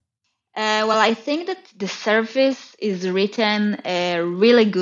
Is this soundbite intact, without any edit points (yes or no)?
yes